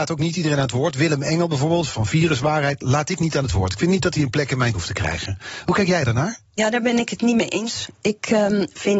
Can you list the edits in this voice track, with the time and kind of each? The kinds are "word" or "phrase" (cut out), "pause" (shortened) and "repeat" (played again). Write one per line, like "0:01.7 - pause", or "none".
0:01.9 - word
0:04.7 - word